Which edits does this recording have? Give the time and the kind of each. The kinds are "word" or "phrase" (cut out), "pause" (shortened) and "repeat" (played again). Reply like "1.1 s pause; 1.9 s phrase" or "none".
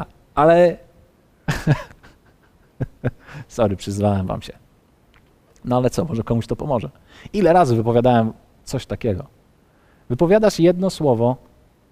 none